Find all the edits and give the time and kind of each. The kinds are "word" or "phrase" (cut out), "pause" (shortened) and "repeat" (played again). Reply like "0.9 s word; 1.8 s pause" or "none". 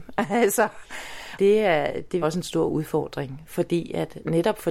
1.4 s word; 2.2 s phrase